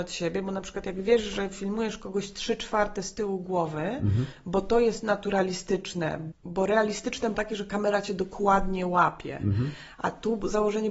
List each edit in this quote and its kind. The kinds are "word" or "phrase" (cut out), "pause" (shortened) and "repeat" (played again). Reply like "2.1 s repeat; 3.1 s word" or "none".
6.3 s word; 7.3 s word